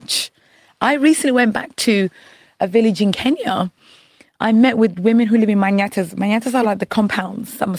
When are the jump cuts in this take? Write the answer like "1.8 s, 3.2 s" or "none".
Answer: none